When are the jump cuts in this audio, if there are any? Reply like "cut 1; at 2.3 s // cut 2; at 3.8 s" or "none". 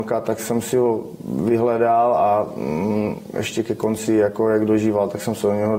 none

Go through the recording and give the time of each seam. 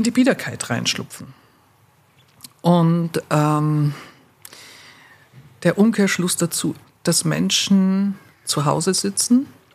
cut 1; at 6.8 s

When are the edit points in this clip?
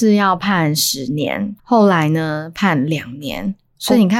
cut 1; at 1.6 s

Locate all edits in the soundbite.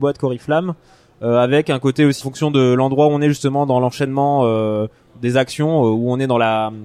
cut 1; at 2.2 s

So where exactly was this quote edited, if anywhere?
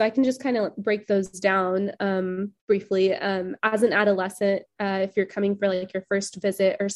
cut 1; at 2.6 s

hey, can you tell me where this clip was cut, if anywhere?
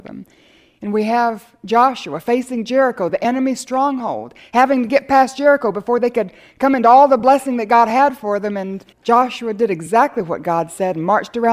cut 1; at 8.9 s

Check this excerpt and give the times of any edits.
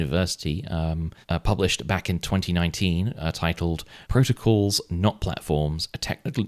cut 1; at 1.2 s // cut 2; at 4.0 s

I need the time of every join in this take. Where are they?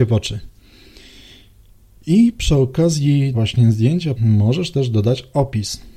cut 1; at 3.3 s // cut 2; at 4.2 s

